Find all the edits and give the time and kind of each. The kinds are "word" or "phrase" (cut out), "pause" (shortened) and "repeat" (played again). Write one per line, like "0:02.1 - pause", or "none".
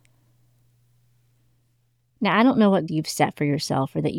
0:02.9 - word